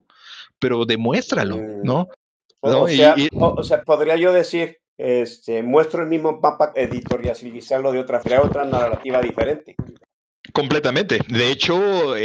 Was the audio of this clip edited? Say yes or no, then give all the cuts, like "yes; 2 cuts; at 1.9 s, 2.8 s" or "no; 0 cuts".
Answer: yes; 6 cuts; at 2.4 s, 3.3 s, 3.8 s, 4.9 s, 6.7 s, 8.2 s